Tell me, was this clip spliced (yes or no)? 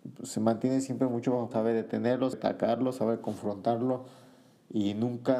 yes